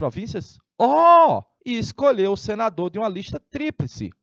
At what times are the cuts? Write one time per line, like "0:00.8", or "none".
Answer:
0:01.6